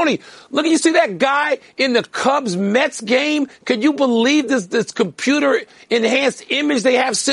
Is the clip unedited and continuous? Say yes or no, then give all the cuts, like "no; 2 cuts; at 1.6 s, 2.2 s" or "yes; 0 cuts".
yes; 0 cuts